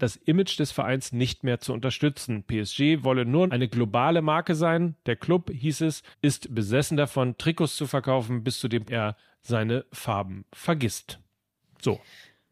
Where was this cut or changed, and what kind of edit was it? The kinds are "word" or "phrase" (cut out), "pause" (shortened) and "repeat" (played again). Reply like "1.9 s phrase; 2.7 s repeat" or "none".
3.5 s word; 6.1 s pause; 8.8 s phrase